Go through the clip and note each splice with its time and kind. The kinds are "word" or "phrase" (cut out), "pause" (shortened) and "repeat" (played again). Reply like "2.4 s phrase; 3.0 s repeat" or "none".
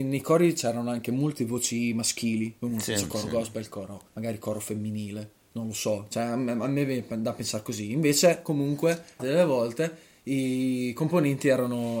4.1 s pause; 9.2 s phrase